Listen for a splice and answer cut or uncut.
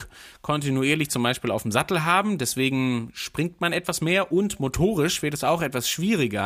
uncut